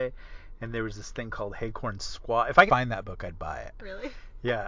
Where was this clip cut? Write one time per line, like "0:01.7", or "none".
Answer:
0:02.7